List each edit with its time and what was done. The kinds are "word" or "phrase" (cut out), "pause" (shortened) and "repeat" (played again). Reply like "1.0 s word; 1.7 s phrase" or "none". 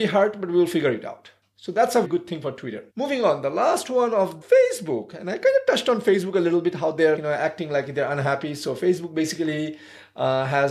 2.0 s word; 2.9 s pause; 4.4 s phrase; 7.2 s word